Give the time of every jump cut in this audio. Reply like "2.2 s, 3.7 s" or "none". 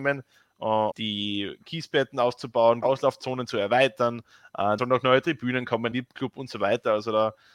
0.9 s, 2.8 s, 4.8 s, 5.9 s